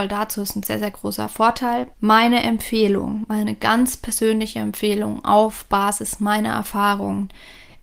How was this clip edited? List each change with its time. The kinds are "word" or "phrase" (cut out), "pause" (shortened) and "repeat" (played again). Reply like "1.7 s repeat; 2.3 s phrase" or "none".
1.9 s pause